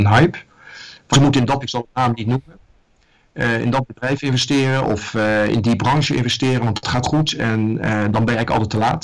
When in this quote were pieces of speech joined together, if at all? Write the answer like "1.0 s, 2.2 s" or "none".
1.1 s, 1.6 s, 7.0 s